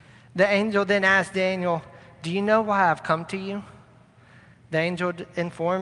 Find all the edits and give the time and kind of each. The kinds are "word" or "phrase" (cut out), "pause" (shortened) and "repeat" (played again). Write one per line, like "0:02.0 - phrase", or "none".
none